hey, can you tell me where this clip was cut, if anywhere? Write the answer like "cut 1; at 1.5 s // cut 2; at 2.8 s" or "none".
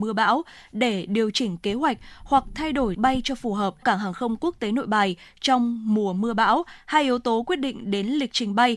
cut 1; at 2.9 s // cut 2; at 3.8 s